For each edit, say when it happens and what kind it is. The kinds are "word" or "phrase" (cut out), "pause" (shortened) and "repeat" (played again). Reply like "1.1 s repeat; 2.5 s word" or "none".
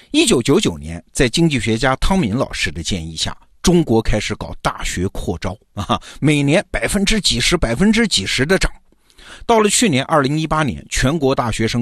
5.6 s pause